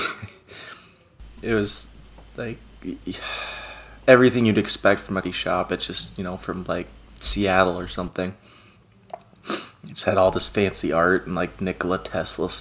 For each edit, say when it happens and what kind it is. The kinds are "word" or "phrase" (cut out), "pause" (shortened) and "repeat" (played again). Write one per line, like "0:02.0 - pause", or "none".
0:05.2 - word